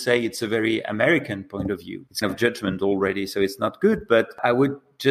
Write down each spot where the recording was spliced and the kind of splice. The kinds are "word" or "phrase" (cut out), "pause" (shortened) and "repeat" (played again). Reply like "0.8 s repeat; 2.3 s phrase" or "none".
2.2 s word